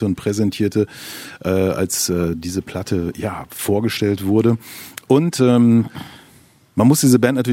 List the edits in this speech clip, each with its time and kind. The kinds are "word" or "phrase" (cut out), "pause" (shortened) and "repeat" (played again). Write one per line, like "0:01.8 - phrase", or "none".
none